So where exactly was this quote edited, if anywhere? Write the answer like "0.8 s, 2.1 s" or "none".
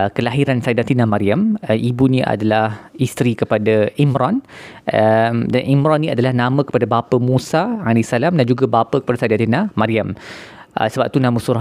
none